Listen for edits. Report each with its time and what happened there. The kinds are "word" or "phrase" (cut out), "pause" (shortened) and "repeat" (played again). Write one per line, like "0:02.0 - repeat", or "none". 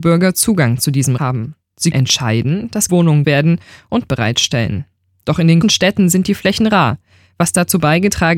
0:01.2 - word
0:01.9 - word
0:02.9 - word
0:03.2 - word
0:04.1 - word
0:05.6 - word

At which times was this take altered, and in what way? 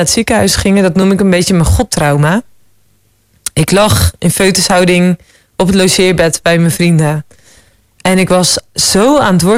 none

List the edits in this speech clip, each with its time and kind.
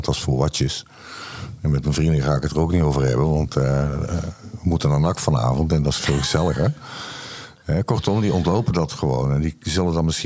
none

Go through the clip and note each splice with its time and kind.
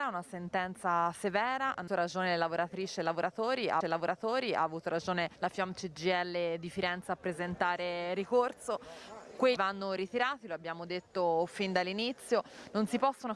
0:01.9 - word
0:03.8 - repeat
0:05.4 - pause
0:09.6 - word

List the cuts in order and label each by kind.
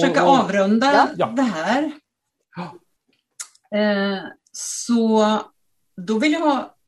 none

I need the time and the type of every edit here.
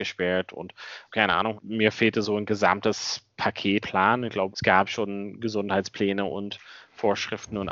0:01.1 - word
0:01.6 - word
0:03.8 - word
0:04.5 - word

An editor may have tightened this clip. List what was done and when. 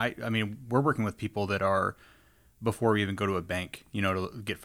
none

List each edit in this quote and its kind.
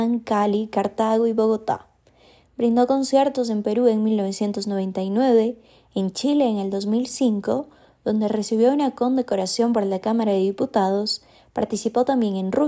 none

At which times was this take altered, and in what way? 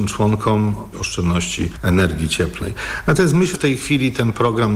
0:00.9 - word
0:03.5 - word

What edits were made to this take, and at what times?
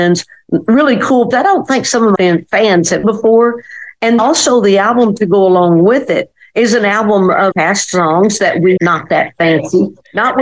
0:01.3 - word
0:02.2 - word
0:03.0 - word
0:04.2 - word
0:07.5 - word
0:08.8 - word

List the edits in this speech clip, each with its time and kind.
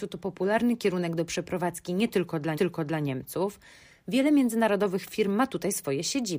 0:02.5 - repeat

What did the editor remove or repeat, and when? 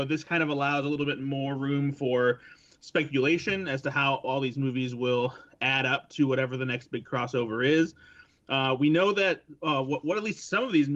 none

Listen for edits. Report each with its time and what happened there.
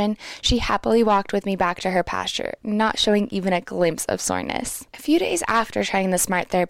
none

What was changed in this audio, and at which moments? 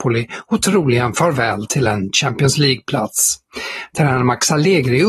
none

